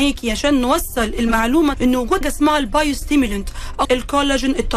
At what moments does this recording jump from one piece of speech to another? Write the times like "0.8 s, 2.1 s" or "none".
1.7 s, 2.2 s, 3.8 s